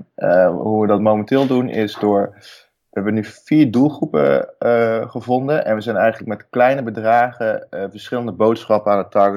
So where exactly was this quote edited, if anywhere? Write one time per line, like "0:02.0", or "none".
none

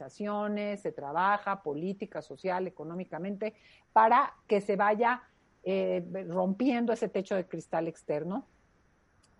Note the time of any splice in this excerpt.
none

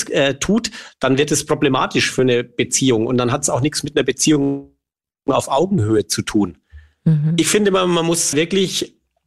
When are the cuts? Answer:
0:08.3

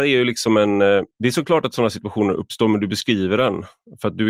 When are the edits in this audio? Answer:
0:01.1

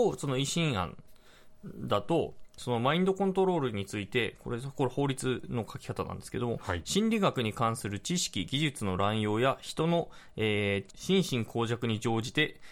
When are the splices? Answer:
0:10.9

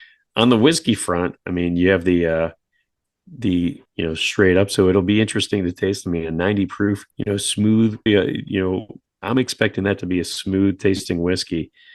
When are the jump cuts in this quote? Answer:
0:03.9
0:07.1
0:08.1

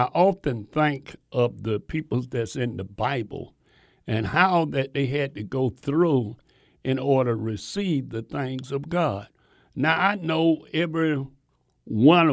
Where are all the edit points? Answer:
none

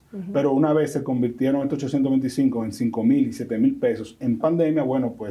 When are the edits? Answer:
0:04.4

